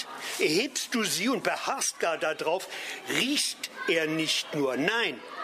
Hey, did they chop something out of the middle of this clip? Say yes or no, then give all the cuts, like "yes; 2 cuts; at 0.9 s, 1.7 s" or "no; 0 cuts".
no; 0 cuts